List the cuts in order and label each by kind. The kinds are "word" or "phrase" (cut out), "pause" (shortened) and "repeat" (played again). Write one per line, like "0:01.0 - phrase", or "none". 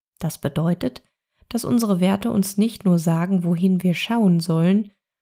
none